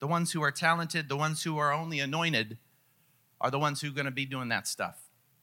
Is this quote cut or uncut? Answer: uncut